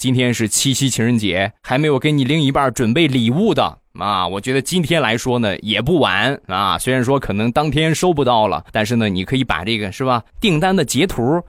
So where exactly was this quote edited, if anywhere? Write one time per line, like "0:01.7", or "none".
0:01.6
0:08.7
0:10.3